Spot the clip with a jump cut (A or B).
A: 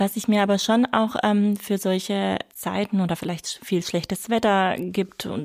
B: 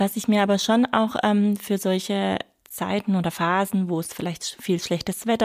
A